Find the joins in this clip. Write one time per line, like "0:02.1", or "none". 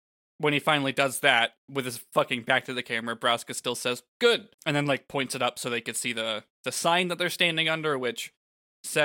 0:04.5
0:06.5